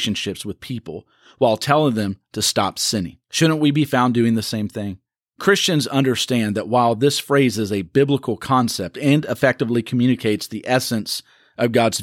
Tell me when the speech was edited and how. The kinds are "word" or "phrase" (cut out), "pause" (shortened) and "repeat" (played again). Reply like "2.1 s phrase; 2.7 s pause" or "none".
3.2 s pause